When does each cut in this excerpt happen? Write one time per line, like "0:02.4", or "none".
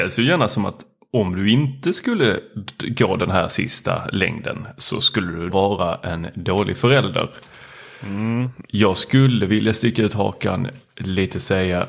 0:05.5

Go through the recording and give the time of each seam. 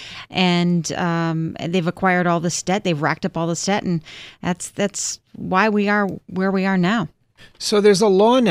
none

